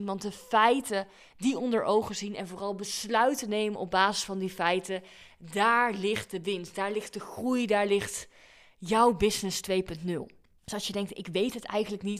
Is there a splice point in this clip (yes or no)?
no